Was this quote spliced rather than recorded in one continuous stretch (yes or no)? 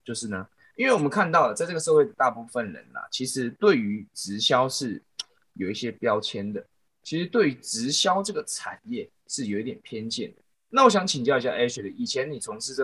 no